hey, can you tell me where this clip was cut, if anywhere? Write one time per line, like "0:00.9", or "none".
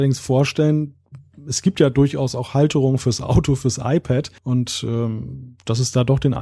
0:04.4